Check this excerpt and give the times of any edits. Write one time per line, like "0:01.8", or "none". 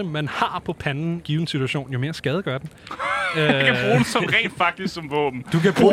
0:01.2